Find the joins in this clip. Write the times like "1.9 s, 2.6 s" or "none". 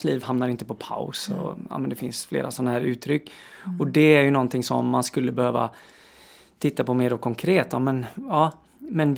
none